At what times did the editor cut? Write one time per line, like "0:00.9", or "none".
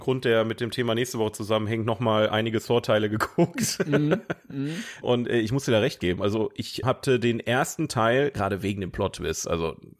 0:05.0
0:06.8